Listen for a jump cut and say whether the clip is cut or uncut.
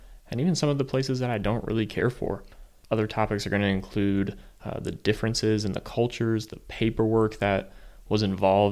uncut